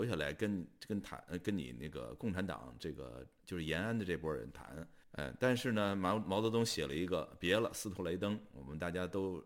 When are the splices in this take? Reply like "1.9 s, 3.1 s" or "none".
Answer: 5.0 s